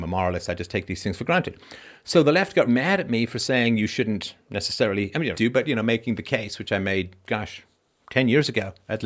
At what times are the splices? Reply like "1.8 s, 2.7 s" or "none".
2.7 s, 4.4 s, 5.3 s